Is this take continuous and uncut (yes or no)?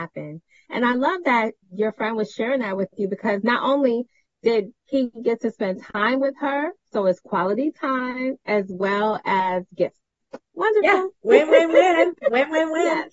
no